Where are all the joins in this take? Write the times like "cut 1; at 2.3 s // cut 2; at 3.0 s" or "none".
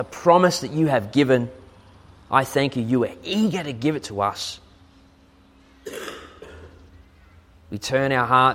none